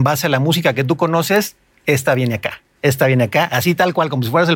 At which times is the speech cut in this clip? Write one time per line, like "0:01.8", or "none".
none